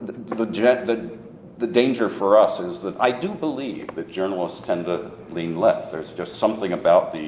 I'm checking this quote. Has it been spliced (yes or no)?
no